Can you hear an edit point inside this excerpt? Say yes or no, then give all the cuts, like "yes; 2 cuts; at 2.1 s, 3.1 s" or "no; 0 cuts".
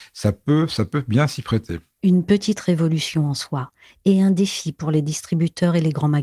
no; 0 cuts